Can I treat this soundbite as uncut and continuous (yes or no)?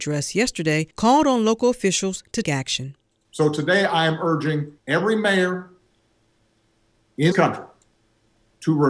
no